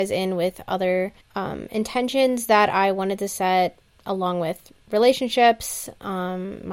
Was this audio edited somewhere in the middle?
yes; 1 cut; at 1.2 s

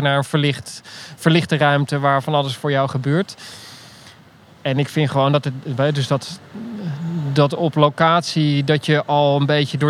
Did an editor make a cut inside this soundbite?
no; 0 cuts

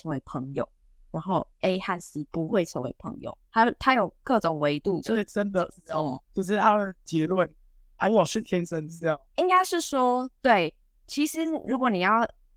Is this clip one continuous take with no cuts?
no; 2 cuts; at 3.5 s, 6.3 s

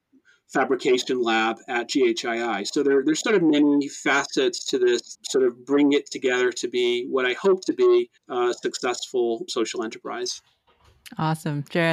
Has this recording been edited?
yes; 3 cuts; at 5.1 s, 8.2 s, 9.5 s

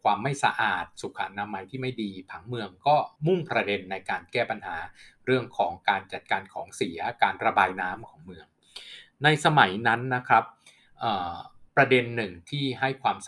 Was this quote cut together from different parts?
yes; 2 cuts; at 3.2 s, 11.7 s

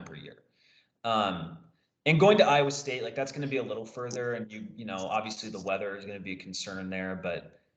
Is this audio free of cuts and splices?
yes; 0 cuts

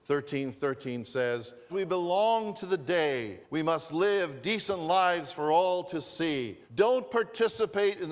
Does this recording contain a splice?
yes; 3 cuts; at 1.7 s, 3.4 s, 6.6 s

